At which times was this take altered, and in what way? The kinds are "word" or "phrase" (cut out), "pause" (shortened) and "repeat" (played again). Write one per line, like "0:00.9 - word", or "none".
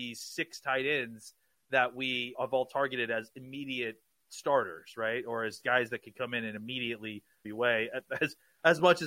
0:02.3 - word
0:07.4 - phrase